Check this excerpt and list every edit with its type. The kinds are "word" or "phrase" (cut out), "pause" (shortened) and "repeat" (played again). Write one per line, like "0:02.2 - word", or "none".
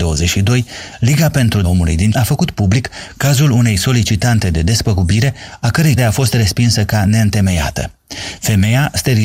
0:01.6 - word
0:02.1 - word
0:06.0 - word